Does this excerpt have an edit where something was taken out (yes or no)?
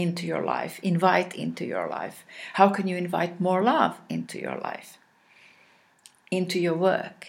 no